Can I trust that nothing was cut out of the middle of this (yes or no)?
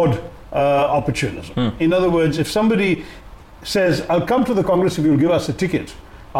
yes